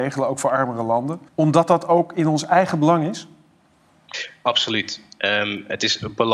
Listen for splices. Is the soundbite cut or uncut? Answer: cut